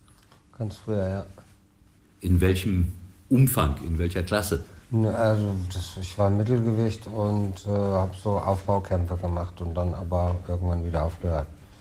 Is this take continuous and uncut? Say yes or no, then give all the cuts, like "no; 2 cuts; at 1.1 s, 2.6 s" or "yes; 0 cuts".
no; 1 cut; at 4.8 s